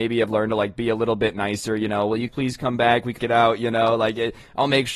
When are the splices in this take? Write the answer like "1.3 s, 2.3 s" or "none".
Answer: 2.3 s, 3.2 s